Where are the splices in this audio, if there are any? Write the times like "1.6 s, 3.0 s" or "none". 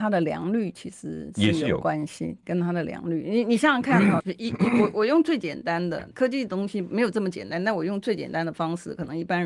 2.4 s, 4.2 s, 6.1 s